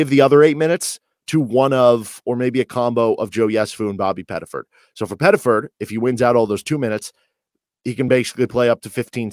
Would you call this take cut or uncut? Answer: uncut